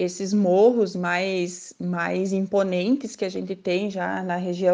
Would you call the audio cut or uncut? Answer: uncut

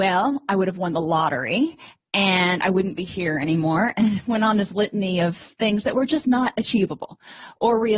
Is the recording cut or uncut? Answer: uncut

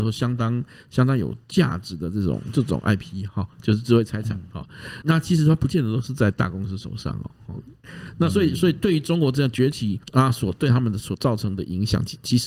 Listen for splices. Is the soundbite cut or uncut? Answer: cut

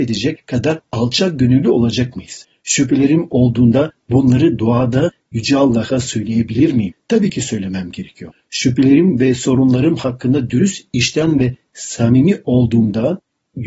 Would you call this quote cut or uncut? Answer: uncut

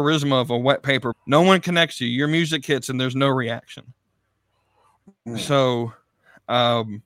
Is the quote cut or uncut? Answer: cut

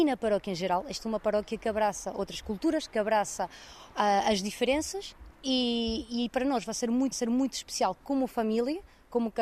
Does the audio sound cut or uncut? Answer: cut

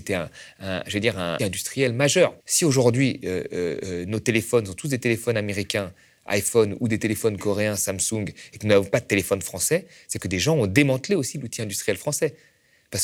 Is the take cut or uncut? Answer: cut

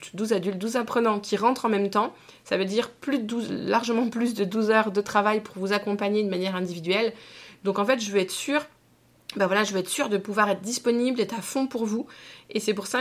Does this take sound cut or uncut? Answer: uncut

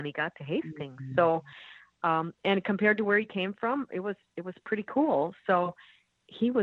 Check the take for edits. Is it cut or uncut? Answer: uncut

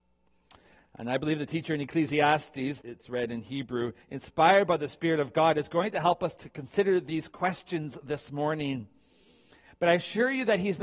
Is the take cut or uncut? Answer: cut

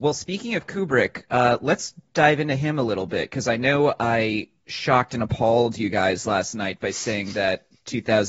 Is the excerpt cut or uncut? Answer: uncut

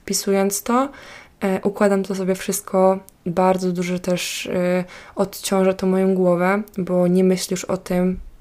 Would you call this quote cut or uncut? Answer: uncut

